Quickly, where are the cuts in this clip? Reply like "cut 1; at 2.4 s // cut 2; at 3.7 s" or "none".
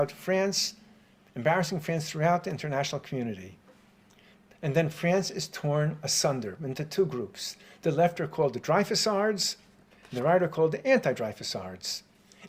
none